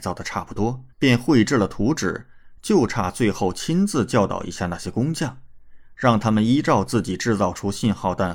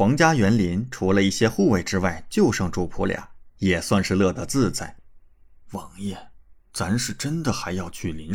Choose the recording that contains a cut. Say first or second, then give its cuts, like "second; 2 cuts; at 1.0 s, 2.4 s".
first; 1 cut; at 0.9 s